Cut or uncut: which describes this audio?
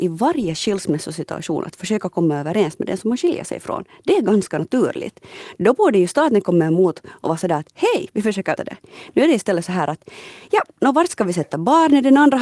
cut